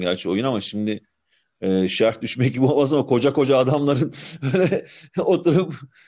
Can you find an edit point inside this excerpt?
no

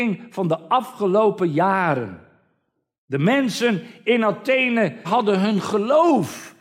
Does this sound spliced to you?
yes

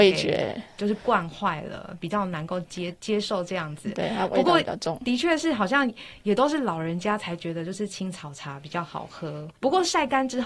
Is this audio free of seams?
no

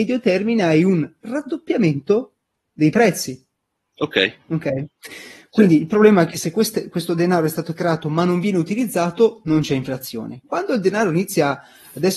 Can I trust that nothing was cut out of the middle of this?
yes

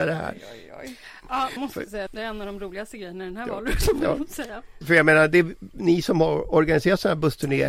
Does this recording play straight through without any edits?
no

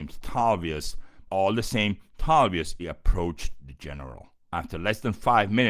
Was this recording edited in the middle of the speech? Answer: yes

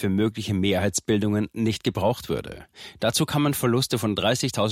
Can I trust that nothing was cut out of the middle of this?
yes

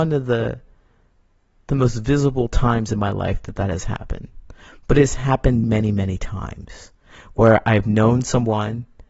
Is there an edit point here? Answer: yes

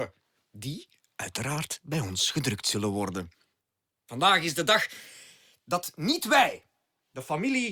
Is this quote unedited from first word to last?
yes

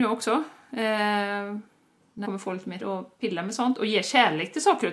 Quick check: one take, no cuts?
no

